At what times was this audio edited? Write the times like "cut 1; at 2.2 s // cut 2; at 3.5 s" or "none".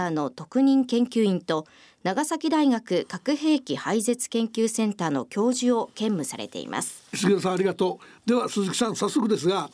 none